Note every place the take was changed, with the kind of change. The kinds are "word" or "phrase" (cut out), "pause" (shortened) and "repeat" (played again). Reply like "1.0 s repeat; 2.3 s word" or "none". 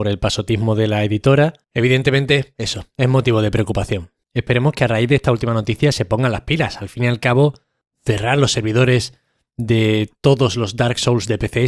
1.6 s pause